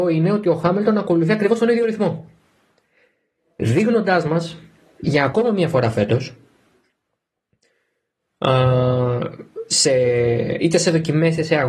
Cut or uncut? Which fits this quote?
uncut